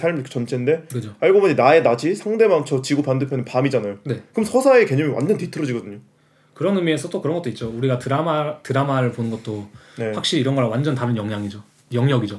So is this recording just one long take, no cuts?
yes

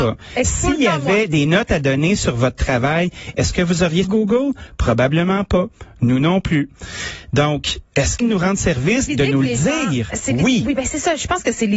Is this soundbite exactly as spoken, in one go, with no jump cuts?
no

